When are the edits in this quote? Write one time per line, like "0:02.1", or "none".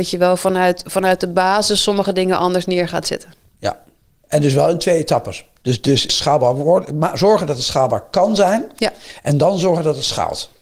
0:06.1